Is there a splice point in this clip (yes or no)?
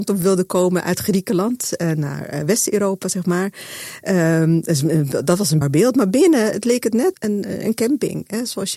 yes